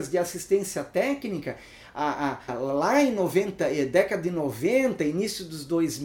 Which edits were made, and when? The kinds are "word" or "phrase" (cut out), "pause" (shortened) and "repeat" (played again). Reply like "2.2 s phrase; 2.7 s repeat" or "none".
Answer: 2.5 s word